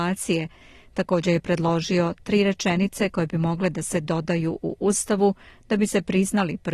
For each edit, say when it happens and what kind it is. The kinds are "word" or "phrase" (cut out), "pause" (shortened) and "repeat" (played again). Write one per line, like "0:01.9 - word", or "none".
none